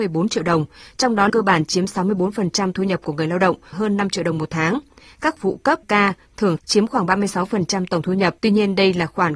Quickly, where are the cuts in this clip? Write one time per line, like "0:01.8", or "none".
0:01.3
0:02.7
0:03.7
0:05.4
0:05.8
0:06.6
0:08.4